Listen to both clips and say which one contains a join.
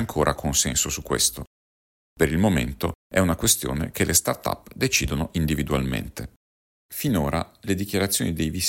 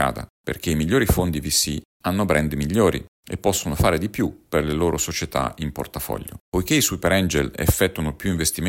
second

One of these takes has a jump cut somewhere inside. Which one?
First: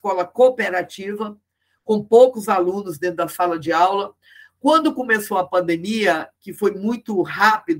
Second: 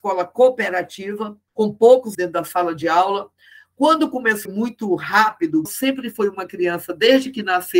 second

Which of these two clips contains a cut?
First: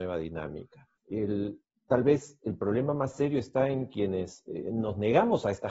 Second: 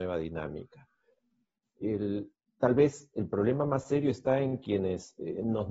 first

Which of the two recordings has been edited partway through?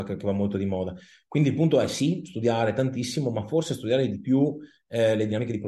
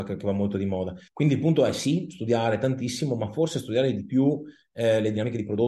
second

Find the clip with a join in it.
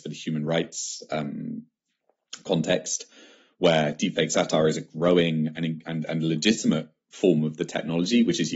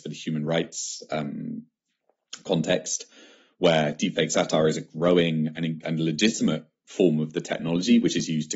second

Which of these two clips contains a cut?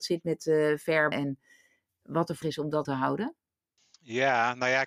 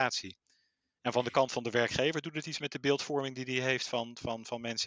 first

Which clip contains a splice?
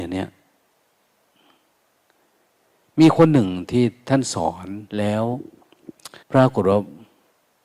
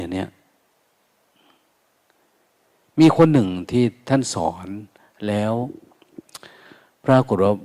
first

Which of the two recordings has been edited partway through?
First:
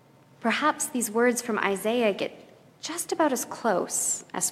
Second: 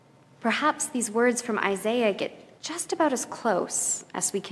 second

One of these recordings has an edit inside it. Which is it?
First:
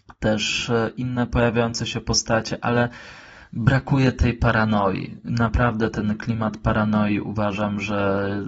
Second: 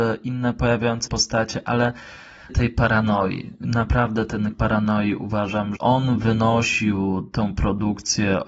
second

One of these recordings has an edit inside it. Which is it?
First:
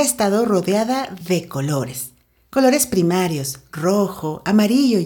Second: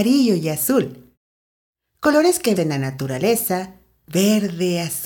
second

